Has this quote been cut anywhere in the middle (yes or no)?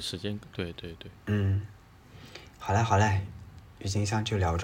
yes